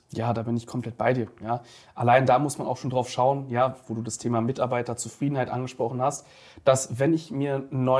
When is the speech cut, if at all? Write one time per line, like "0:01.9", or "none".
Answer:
none